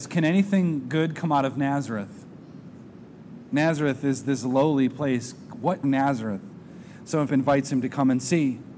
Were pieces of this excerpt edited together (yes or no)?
yes